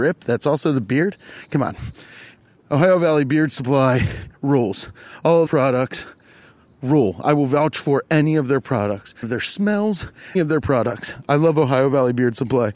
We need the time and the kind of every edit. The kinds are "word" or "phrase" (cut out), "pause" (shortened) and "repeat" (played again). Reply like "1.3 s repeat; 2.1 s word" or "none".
5.5 s word; 9.2 s word; 10.3 s word

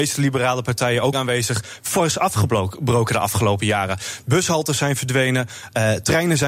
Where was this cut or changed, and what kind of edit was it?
1.1 s word

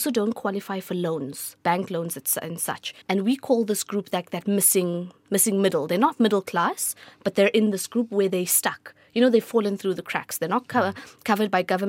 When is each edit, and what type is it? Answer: 1.6 s pause; 3.0 s pause

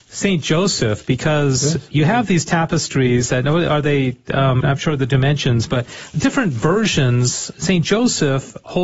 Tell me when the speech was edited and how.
4.6 s word; 6.1 s word; 7.5 s word

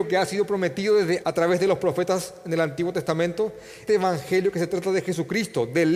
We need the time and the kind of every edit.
1.2 s word; 3.9 s word

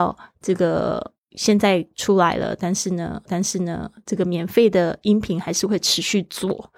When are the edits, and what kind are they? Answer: 1.2 s pause; 3.3 s repeat

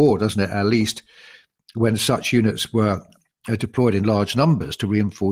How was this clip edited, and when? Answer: none

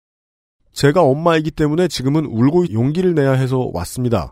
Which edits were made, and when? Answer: 2.7 s phrase

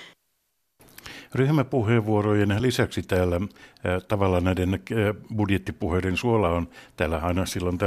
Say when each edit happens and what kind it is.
none

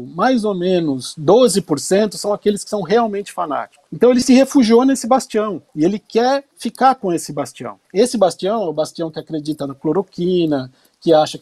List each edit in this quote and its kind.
3.9 s pause; 5.7 s pause; 6.5 s pause; 7.8 s pause

